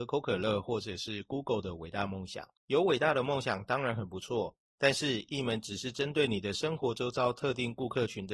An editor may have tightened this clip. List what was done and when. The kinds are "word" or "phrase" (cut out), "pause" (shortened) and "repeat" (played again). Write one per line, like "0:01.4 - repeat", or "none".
0:02.6 - pause